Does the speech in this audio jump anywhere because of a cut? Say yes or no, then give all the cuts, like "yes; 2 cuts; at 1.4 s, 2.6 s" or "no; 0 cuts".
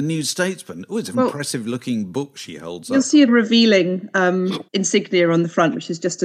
yes; 3 cuts; at 1.1 s, 3.3 s, 4.7 s